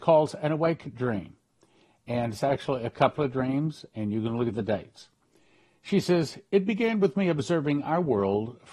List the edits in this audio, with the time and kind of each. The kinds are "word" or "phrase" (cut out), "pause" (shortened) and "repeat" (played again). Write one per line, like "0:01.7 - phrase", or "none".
none